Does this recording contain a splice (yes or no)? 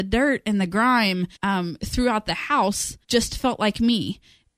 yes